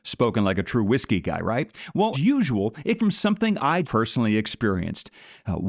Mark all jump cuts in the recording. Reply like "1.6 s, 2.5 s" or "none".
2.1 s, 3.0 s, 3.8 s